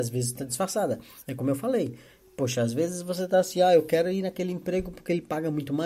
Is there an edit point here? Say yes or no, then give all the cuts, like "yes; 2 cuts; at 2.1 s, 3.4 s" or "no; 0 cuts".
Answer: no; 0 cuts